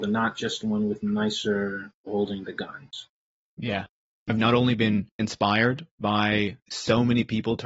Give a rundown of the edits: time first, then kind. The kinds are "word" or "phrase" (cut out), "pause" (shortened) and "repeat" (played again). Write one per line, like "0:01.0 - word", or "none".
0:02.1 - word
0:04.3 - word
0:05.2 - word
0:06.7 - word